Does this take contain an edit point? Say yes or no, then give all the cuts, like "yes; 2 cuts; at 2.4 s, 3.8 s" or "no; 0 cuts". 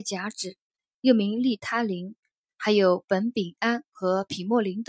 yes; 1 cut; at 3.9 s